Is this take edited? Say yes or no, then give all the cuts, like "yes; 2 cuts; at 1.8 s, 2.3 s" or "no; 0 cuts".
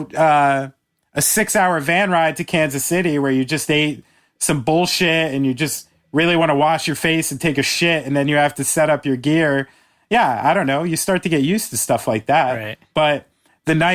no; 0 cuts